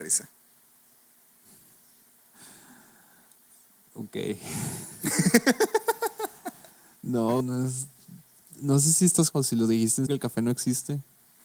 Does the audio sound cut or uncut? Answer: cut